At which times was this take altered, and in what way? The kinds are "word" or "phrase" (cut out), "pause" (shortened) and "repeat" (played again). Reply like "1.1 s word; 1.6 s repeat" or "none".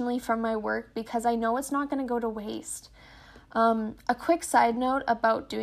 none

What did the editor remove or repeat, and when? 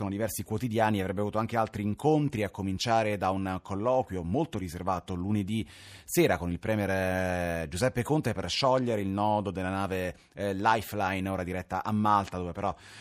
none

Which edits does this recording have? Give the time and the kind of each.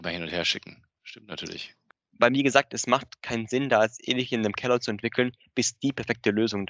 none

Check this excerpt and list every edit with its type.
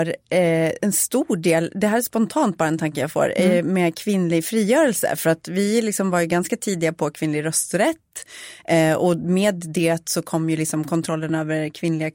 none

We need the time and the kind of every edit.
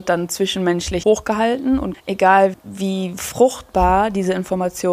1.0 s word; 1.9 s word; 2.5 s word

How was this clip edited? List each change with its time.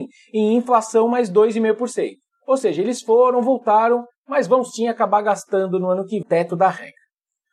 6.2 s phrase

